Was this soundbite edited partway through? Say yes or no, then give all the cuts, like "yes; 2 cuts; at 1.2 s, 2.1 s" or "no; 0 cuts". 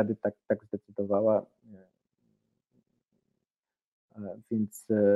no; 0 cuts